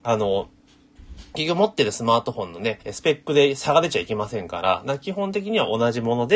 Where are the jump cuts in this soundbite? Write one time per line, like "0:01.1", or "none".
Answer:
0:02.8